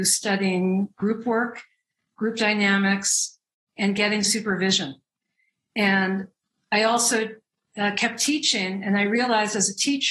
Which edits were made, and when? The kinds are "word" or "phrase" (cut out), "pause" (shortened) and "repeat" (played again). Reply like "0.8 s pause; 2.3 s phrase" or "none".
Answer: none